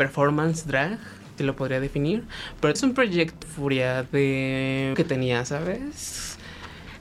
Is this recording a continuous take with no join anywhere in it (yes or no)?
no